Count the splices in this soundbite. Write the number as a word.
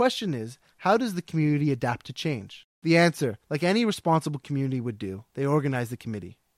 three